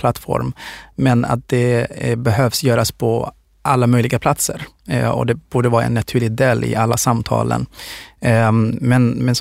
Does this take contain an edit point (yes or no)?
no